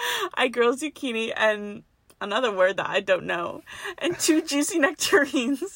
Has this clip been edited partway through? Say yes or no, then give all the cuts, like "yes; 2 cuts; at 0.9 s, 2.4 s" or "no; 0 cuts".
no; 0 cuts